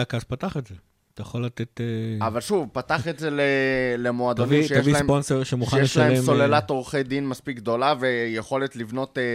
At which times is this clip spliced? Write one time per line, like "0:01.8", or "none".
none